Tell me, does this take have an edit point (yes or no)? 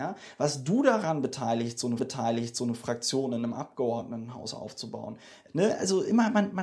yes